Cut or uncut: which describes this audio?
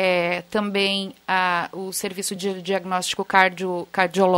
uncut